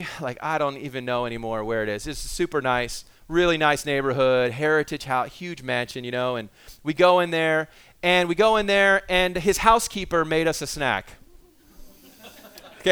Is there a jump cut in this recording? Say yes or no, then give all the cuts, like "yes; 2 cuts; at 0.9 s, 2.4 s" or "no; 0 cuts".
no; 0 cuts